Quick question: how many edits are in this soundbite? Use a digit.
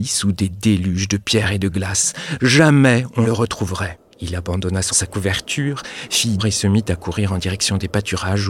4